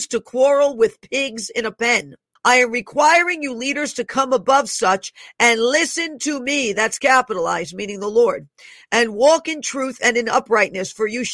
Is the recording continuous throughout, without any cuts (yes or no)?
no